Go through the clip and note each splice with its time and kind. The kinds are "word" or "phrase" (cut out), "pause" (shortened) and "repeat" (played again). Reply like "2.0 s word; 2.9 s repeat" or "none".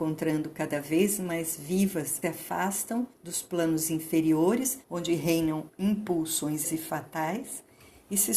2.2 s phrase; 3.1 s pause; 4.8 s pause; 5.7 s word; 6.6 s word